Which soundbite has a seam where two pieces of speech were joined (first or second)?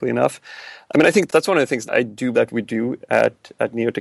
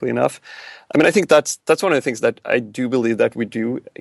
first